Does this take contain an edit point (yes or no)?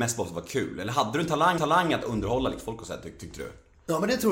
yes